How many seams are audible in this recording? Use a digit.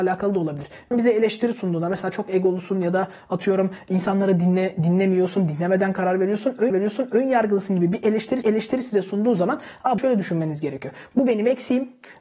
4